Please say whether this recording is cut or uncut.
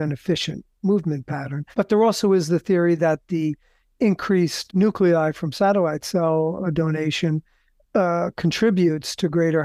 cut